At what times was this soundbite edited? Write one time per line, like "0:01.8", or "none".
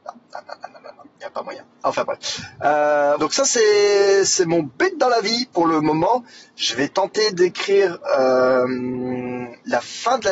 0:03.2